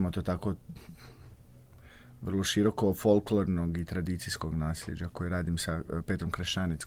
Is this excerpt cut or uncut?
uncut